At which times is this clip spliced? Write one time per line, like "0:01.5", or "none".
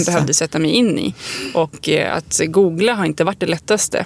none